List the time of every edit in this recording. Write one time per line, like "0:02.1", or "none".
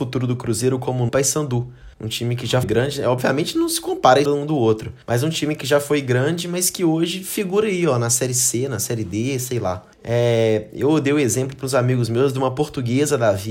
0:01.1
0:01.9
0:02.6
0:04.2
0:05.0
0:09.9